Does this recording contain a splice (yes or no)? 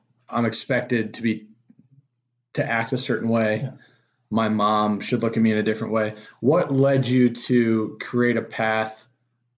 no